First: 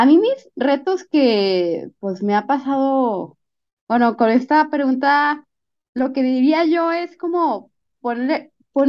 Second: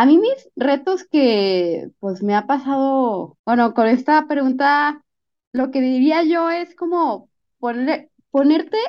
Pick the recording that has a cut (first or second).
second